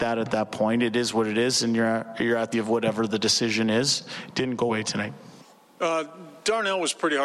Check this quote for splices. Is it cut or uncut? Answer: cut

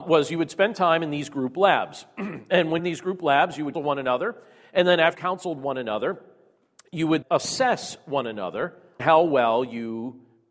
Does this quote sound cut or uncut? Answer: cut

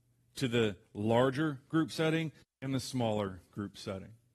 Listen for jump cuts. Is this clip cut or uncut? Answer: uncut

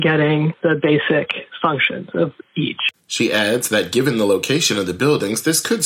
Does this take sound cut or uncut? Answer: uncut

